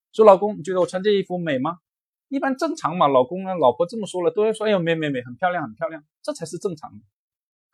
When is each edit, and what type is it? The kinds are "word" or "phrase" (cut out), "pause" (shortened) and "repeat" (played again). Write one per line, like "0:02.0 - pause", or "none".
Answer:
0:01.9 - pause